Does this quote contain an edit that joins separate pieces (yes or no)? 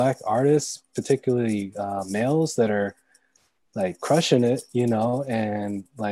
no